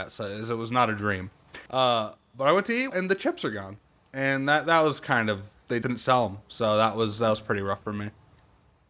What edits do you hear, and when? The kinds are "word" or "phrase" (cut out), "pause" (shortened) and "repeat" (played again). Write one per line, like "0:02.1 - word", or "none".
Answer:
0:01.7 - pause
0:02.9 - word
0:05.8 - word

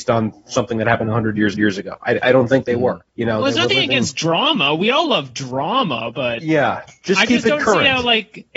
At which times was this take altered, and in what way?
0:01.5 - repeat
0:03.1 - pause

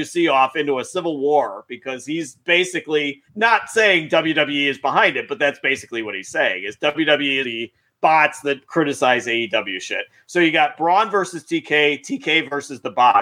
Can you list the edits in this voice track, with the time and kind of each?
0:03.3 - pause
0:07.4 - phrase

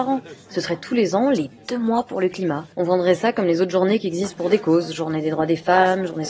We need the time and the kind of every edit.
0:02.7 - pause

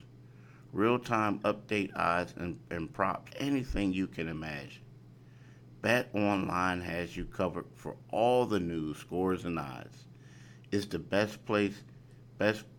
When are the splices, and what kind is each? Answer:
0:03.3 - phrase

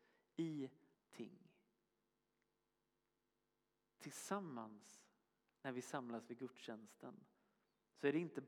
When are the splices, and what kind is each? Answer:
0:00.9 - word

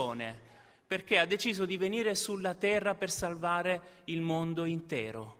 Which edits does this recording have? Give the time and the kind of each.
none

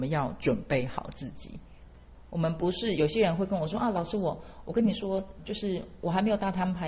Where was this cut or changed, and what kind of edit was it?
0:05.4 - word

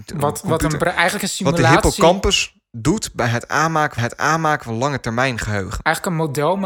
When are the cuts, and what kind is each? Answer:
0:04.0 - repeat

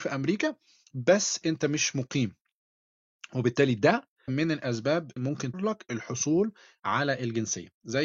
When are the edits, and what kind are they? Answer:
0:04.3 - word
0:05.2 - word
0:05.5 - word

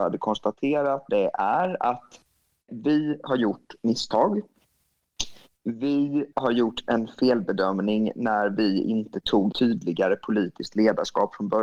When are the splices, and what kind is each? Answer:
0:01.1 - word
0:02.7 - word
0:06.3 - word
0:09.5 - word

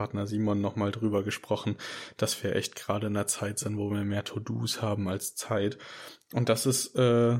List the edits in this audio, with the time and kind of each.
none

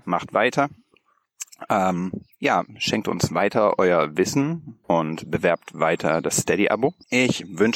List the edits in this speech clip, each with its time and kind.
0:04.8 - pause

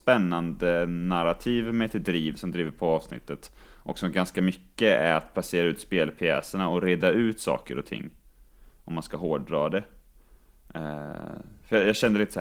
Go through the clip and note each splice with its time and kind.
none

